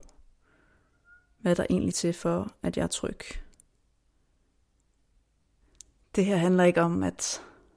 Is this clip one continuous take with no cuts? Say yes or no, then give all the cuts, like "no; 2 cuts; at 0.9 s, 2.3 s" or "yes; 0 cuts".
no; 1 cut; at 1.9 s